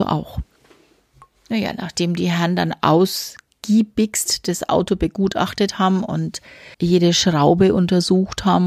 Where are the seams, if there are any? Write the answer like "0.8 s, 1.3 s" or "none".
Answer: 6.7 s